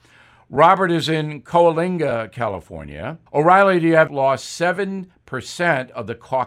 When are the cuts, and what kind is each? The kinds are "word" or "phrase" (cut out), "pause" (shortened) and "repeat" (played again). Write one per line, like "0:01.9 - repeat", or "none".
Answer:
0:03.3 - pause
0:04.1 - phrase

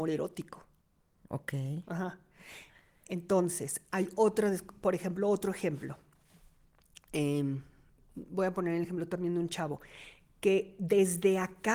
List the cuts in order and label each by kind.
none

